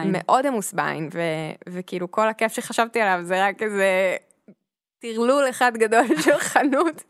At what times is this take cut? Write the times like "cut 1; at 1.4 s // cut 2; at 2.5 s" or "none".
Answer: none

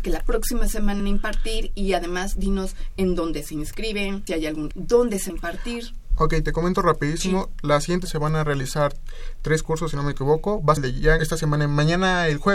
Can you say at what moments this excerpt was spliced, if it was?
cut 1; at 1.0 s // cut 2; at 4.3 s // cut 3; at 4.7 s // cut 4; at 5.3 s // cut 5; at 8.1 s // cut 6; at 10.8 s // cut 7; at 11.2 s

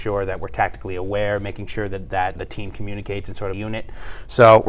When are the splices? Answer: cut 1; at 2.4 s // cut 2; at 3.5 s

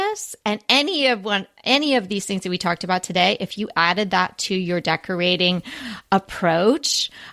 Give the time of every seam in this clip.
none

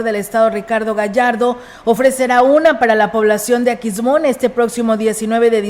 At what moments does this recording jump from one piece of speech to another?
none

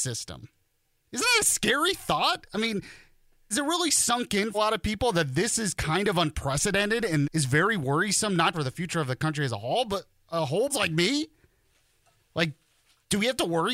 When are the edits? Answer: cut 1; at 3.5 s // cut 2; at 4.5 s // cut 3; at 7.2 s // cut 4; at 8.5 s // cut 5; at 10.7 s

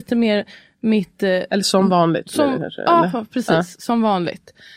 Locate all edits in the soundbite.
none

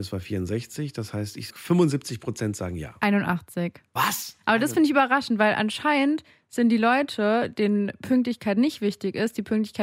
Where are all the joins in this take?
cut 1; at 1.5 s

